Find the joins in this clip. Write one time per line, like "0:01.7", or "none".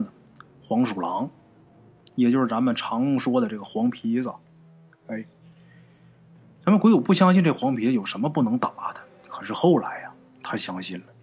none